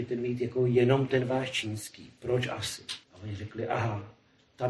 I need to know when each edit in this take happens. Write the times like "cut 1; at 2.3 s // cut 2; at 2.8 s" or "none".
cut 1; at 3.0 s